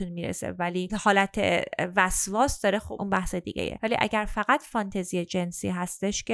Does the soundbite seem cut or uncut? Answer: uncut